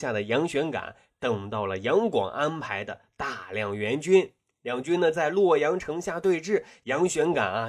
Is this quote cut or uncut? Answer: uncut